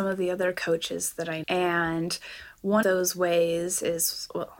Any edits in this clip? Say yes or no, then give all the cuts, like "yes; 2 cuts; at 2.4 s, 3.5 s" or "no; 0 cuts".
yes; 2 cuts; at 1.4 s, 2.8 s